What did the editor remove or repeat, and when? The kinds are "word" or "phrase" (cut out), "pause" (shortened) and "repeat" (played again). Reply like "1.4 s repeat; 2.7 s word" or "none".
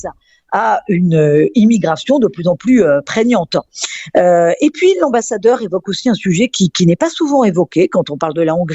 none